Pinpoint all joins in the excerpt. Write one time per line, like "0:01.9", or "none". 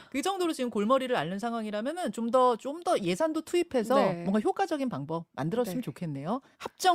none